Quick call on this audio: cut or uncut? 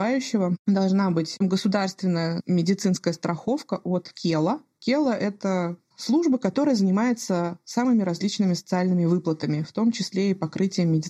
uncut